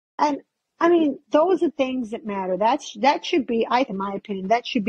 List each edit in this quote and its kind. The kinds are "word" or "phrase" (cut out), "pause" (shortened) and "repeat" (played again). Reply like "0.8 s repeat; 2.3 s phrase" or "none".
1.7 s word; 3.9 s word